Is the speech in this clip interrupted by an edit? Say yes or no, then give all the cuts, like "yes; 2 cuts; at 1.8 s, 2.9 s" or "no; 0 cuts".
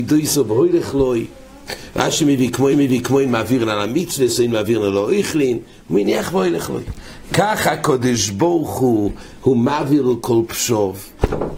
yes; 1 cut; at 2.7 s